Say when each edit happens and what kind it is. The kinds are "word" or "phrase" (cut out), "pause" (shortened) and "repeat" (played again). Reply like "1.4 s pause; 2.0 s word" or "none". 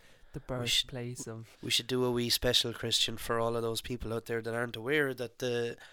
1.5 s pause